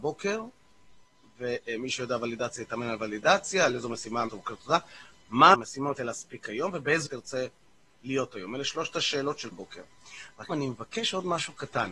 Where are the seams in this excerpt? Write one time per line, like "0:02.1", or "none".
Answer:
0:04.3
0:05.5
0:06.0
0:07.1
0:09.5
0:10.5